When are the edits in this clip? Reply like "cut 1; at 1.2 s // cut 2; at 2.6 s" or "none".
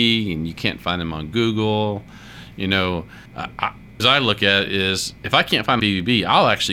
cut 1; at 3.3 s // cut 2; at 4.0 s // cut 3; at 5.8 s